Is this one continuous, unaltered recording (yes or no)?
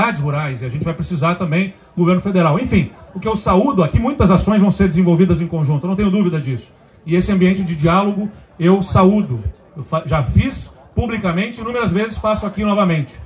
no